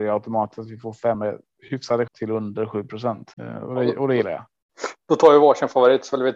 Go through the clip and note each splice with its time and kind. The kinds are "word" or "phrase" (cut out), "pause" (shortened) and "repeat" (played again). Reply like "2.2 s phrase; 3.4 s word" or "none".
1.1 s word; 2.1 s phrase; 3.3 s pause